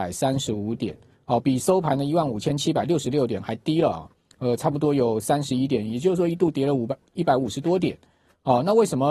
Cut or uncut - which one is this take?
uncut